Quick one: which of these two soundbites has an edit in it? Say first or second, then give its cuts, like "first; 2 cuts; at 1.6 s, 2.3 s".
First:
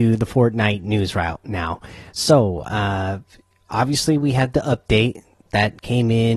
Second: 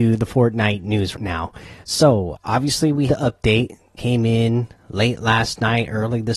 second; 4 cuts; at 1.1 s, 2.3 s, 3.1 s, 4.0 s